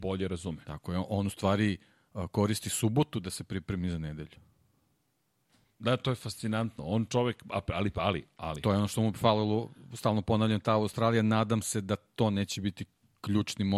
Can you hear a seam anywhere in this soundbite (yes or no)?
no